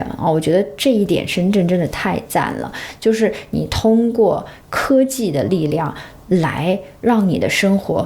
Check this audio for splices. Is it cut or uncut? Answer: cut